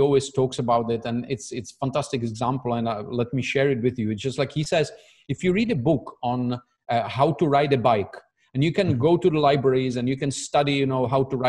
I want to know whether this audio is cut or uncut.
uncut